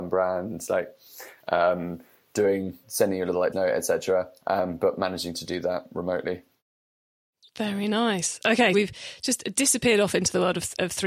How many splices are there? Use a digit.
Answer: 3